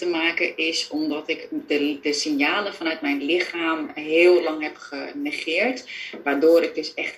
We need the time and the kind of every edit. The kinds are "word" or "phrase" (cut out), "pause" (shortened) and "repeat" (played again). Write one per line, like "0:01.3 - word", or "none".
none